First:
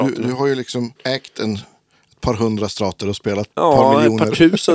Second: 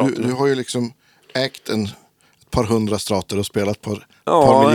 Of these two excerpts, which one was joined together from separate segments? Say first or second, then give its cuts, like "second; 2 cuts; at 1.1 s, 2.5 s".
first; 2 cuts; at 1.0 s, 3.5 s